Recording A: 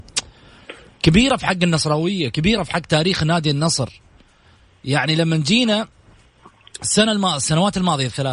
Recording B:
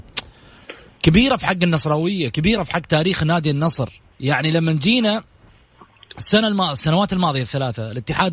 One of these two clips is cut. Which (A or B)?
B